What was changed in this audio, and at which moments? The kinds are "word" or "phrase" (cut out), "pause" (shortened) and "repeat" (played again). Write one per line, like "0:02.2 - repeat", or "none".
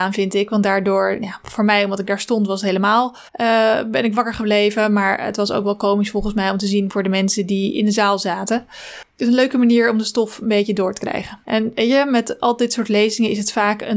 0:03.3 - pause
0:09.1 - pause